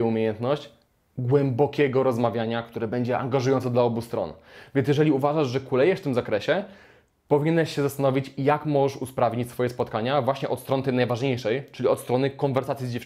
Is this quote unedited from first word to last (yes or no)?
yes